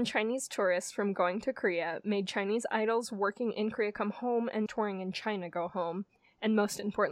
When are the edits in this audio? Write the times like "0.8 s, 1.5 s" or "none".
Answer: 4.7 s